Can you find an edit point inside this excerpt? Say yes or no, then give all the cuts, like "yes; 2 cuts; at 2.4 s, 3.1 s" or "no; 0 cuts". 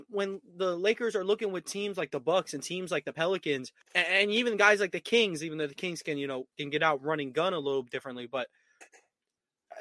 yes; 2 cuts; at 3.8 s, 6.5 s